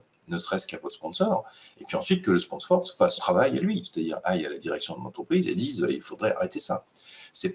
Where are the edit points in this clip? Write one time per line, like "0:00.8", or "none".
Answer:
0:03.2